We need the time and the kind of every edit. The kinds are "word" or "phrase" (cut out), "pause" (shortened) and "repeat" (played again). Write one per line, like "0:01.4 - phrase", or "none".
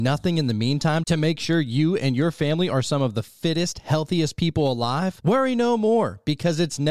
none